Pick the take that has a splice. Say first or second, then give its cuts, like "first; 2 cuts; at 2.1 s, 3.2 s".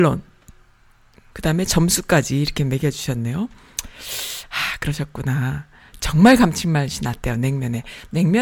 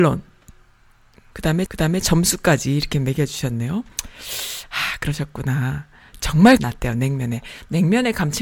second; 3 cuts; at 1.7 s, 3.9 s, 6.6 s